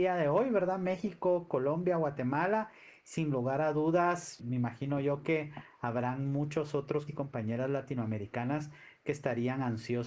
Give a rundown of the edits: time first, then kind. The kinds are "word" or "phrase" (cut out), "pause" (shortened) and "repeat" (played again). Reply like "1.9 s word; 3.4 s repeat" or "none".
4.4 s word; 7.1 s word